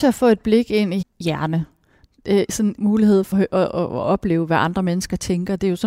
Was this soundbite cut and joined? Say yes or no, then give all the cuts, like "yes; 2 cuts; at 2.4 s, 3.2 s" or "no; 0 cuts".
yes; 3 cuts; at 1.0 s, 2.8 s, 3.3 s